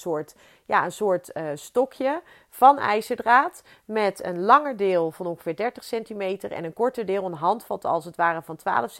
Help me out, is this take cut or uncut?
uncut